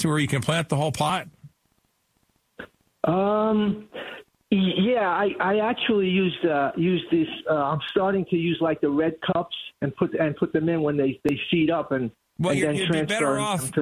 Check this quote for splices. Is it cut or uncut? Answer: uncut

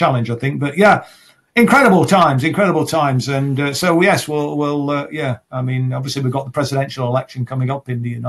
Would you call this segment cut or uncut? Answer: uncut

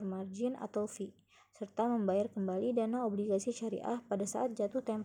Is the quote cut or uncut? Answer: uncut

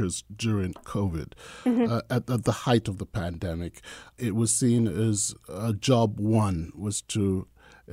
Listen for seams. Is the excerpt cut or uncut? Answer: uncut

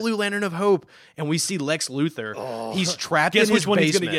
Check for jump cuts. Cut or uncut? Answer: uncut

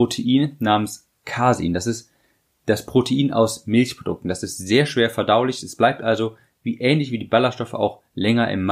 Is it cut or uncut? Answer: uncut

